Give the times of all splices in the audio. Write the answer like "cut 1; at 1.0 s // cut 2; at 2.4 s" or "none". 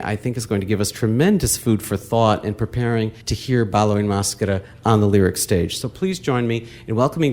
cut 1; at 3.2 s